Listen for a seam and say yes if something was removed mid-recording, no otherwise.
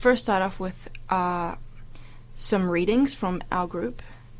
yes